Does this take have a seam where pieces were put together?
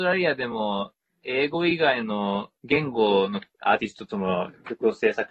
no; 0 cuts

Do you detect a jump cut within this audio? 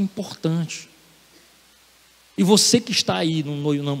no; 0 cuts

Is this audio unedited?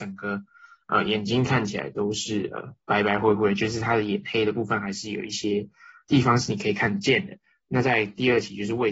yes; 0 cuts

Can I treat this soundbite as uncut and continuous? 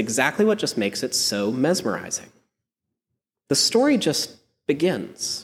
yes; 0 cuts

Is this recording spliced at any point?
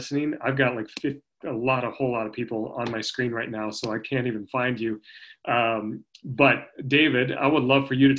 no; 0 cuts

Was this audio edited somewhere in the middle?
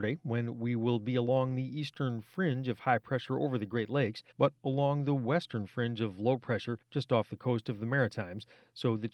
yes; 2 cuts; at 4.3 s, 6.8 s

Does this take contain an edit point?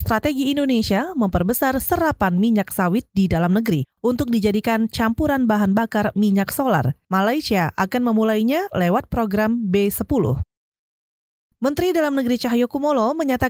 no; 0 cuts

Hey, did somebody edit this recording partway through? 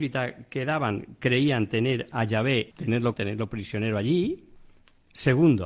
yes; 2 cuts; at 2.7 s, 3.1 s

